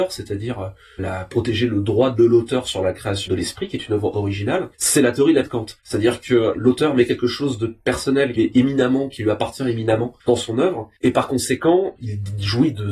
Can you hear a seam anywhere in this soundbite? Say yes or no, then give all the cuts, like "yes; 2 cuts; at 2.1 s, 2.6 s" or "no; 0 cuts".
yes; 8 cuts; at 1.0 s, 3.3 s, 4.7 s, 5.4 s, 5.8 s, 8.4 s, 10.2 s, 11.0 s